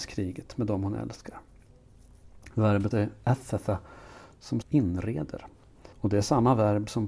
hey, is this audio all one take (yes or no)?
no